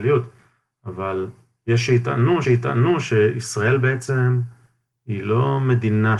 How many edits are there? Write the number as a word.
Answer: one